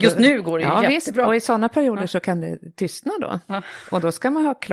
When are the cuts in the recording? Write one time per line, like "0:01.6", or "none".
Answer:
none